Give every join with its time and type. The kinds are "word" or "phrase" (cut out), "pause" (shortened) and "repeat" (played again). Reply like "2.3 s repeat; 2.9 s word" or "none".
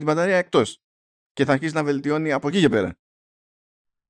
none